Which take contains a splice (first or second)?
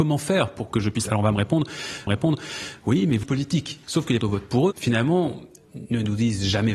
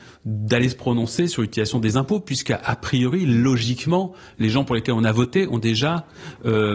first